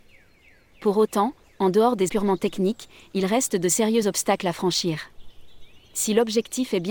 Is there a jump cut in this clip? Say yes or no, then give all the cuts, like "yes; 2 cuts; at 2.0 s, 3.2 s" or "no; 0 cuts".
yes; 1 cut; at 2.1 s